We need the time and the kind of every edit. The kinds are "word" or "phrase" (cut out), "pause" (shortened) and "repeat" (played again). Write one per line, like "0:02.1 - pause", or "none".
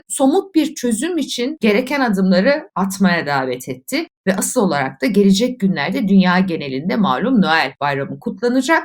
none